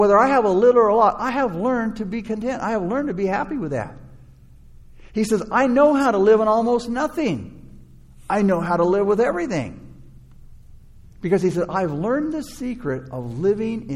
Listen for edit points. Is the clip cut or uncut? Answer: uncut